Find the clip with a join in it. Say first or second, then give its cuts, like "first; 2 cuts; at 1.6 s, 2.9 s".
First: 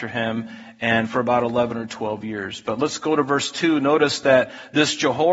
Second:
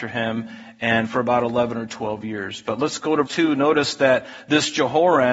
second; 1 cut; at 3.3 s